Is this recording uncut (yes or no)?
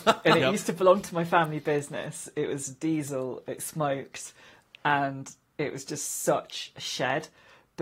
yes